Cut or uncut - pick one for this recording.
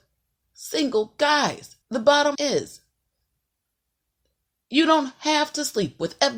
cut